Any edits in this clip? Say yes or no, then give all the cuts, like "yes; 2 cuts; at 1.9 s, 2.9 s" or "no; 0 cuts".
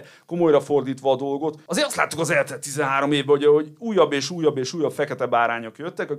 no; 0 cuts